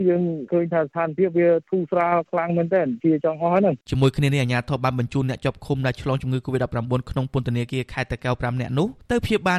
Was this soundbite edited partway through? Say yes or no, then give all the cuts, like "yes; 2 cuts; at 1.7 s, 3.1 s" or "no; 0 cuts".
yes; 1 cut; at 3.8 s